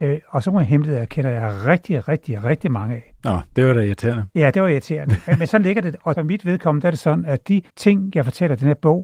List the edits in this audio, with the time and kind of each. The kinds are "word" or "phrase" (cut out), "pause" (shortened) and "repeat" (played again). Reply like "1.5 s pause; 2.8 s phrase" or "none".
6.2 s phrase; 7.7 s pause